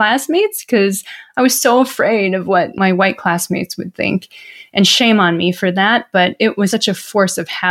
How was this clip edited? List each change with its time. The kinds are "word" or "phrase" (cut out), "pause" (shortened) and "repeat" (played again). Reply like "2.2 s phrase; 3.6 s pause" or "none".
6.7 s word